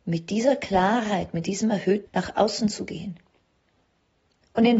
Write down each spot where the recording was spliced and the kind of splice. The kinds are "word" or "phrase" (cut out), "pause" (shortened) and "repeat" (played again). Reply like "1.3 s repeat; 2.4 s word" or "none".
2.1 s word